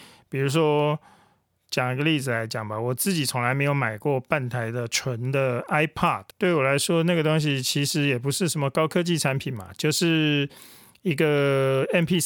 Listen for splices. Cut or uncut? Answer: cut